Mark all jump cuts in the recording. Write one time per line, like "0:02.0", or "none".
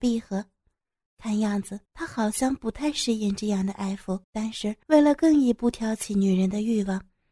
0:01.9
0:04.2
0:04.8